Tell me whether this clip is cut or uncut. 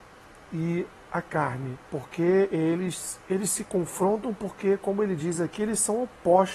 cut